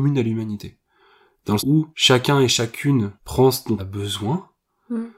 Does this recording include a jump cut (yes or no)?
yes